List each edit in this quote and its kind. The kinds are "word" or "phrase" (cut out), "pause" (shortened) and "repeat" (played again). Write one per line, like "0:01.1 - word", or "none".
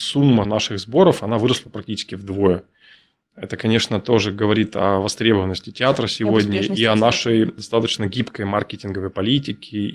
none